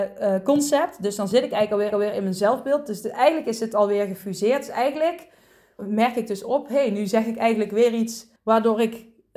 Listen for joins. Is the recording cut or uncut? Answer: cut